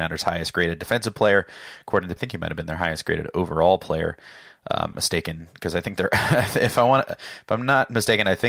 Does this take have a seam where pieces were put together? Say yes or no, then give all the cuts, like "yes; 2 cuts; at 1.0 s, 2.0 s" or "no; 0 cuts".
yes; 2 cuts; at 2.2 s, 4.9 s